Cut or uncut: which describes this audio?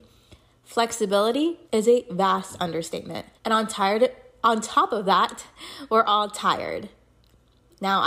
cut